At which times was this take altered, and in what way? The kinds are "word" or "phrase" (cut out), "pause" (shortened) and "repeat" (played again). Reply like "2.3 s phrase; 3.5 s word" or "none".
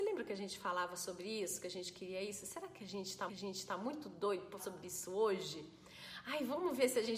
3.3 s repeat; 4.6 s word

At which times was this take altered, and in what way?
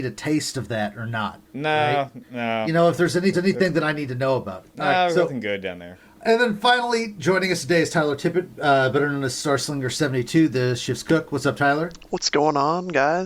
1.4 s pause; 3.3 s repeat

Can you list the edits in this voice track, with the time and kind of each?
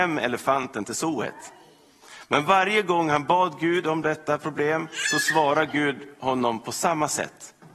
none

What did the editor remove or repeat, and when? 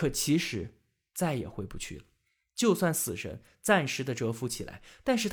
none

